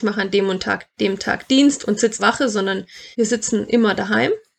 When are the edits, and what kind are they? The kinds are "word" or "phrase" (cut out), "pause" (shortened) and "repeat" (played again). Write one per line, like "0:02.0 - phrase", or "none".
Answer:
0:00.9 - word
0:02.2 - phrase
0:03.1 - pause